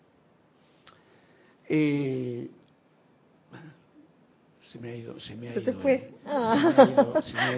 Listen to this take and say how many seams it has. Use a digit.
0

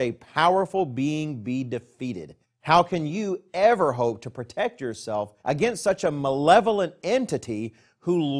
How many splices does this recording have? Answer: 2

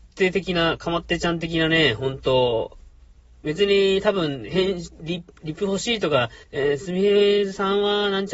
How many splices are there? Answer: 1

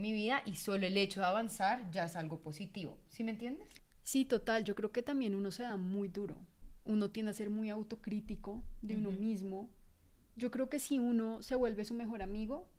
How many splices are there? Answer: 0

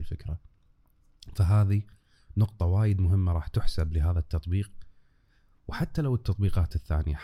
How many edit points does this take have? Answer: 0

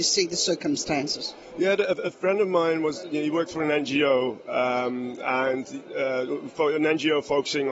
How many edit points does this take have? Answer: 0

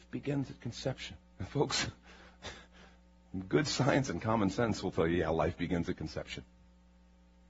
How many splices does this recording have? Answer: 1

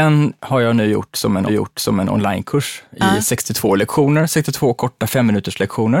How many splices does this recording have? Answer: 1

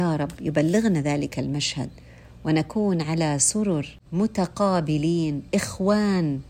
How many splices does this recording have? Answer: 1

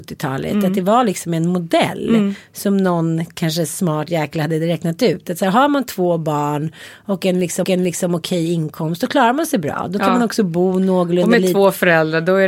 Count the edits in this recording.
1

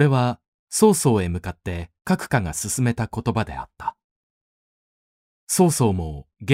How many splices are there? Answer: 1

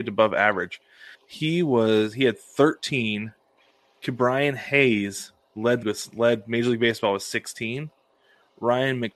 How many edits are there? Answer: 3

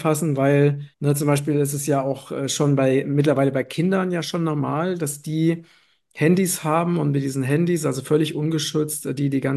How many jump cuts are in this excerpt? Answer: 1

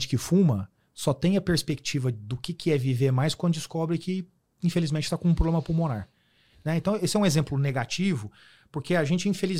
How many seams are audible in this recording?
0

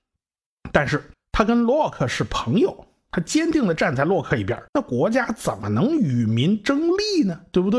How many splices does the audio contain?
2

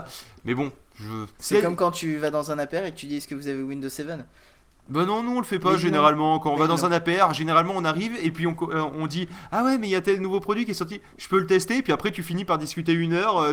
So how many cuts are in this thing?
1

